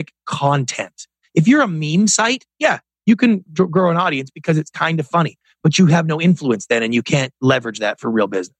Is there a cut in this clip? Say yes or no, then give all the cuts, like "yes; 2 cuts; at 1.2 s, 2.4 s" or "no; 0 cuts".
no; 0 cuts